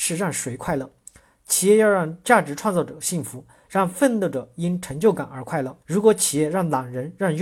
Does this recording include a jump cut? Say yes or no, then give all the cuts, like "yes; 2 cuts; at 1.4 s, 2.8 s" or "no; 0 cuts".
yes; 1 cut; at 5.8 s